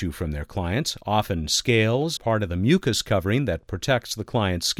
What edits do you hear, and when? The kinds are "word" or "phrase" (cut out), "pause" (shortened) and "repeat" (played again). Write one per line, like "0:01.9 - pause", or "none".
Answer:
0:02.2 - word